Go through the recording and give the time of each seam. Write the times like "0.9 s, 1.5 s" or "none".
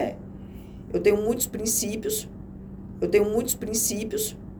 3.0 s